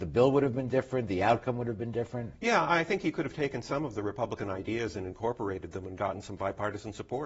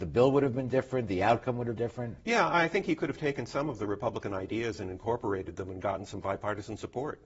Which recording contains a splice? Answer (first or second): second